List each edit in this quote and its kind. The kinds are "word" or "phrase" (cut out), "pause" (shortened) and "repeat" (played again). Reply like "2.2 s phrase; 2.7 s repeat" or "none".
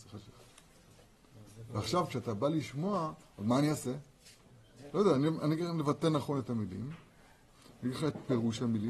none

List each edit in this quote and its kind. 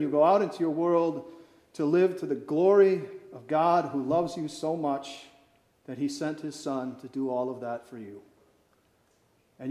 none

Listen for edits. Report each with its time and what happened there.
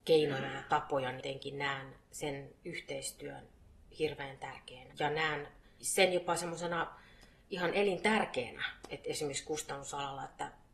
3.9 s pause; 4.9 s word

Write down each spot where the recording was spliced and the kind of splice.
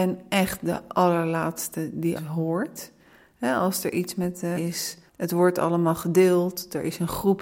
2.2 s word; 4.6 s phrase; 5.1 s pause

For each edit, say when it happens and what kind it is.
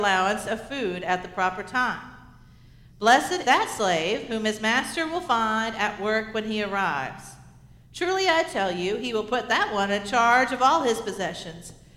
3.4 s word

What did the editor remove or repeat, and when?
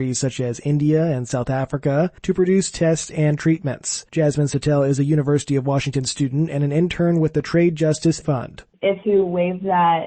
2.2 s pause; 4.1 s pause; 8.2 s word; 9.0 s phrase

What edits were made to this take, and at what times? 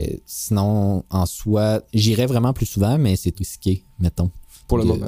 1.9 s pause; 3.3 s word

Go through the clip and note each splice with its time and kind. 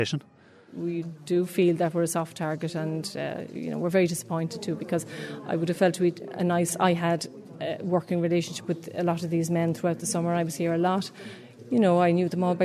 none

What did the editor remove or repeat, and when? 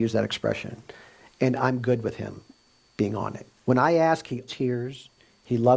3.6 s pause; 4.5 s word

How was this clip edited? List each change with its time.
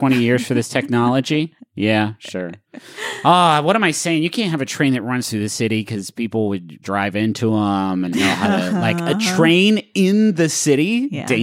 6.8 s word; 8.1 s word

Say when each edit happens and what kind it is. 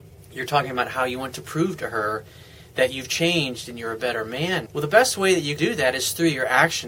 4.7 s word; 5.6 s word

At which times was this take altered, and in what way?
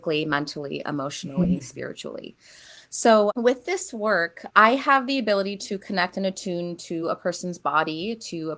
none

